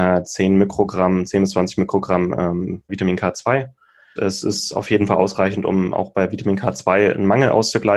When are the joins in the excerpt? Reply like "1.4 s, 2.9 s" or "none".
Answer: 2.9 s, 4.2 s

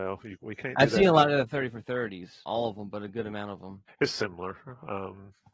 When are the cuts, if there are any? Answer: 2.5 s, 3.9 s

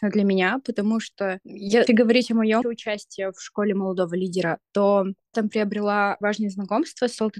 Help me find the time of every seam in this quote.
1.9 s, 2.6 s, 5.3 s, 6.2 s

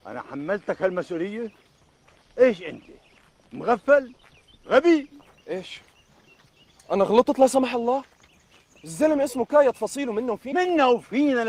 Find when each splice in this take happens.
5.4 s

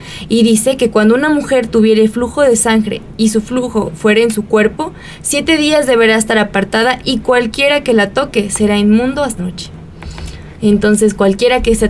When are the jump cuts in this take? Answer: 9.4 s

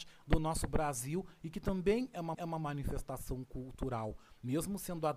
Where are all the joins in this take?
2.3 s

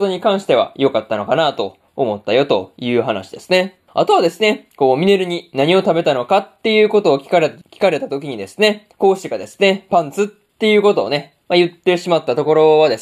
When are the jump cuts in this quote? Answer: 3.9 s, 7.6 s, 8.9 s

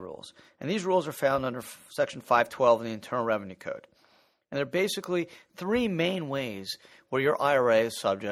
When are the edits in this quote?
none

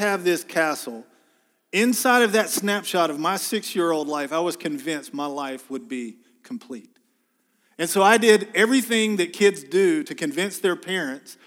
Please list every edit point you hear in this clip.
none

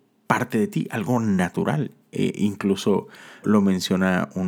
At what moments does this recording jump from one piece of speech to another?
3.4 s

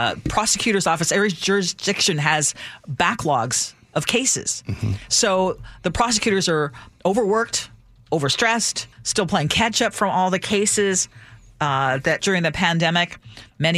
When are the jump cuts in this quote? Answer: 8.9 s, 12.2 s

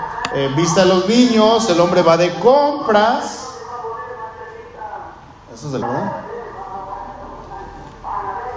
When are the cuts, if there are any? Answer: 5.8 s

